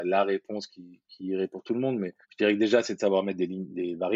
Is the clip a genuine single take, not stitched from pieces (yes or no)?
no